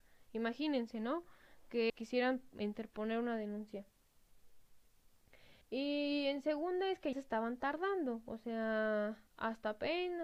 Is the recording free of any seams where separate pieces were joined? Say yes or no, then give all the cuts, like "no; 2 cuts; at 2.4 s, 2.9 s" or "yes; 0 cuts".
no; 4 cuts; at 1.9 s, 5.6 s, 7.1 s, 9.3 s